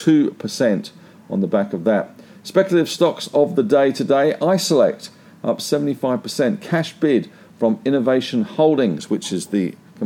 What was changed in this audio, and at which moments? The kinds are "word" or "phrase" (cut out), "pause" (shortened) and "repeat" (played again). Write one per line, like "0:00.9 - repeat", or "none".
none